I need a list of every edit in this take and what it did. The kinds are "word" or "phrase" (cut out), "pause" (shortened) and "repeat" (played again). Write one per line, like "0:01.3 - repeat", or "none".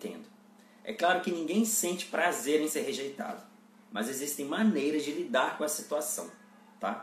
none

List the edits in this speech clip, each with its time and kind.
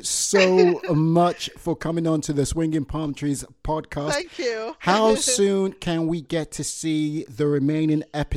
none

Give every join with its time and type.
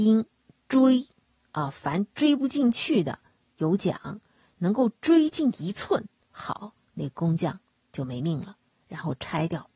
none

